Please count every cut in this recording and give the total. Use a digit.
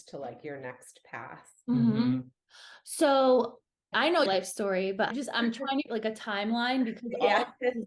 4